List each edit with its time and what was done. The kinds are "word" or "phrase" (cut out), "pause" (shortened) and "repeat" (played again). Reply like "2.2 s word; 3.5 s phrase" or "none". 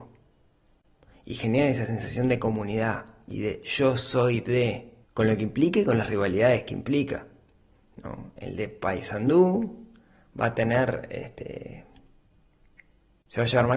5.0 s pause